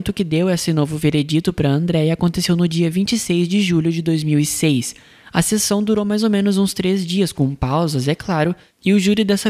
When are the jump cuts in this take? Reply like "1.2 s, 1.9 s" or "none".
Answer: none